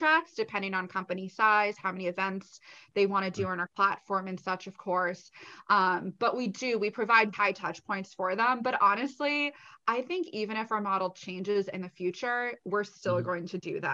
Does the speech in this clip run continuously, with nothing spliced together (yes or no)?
no